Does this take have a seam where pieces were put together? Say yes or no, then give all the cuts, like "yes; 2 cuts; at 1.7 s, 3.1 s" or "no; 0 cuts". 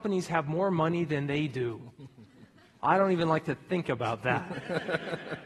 no; 0 cuts